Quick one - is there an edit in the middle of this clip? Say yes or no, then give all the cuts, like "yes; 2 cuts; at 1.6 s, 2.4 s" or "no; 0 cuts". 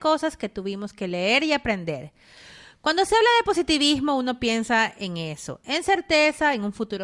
no; 0 cuts